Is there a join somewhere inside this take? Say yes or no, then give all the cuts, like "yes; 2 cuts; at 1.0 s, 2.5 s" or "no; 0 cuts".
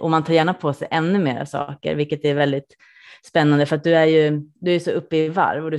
no; 0 cuts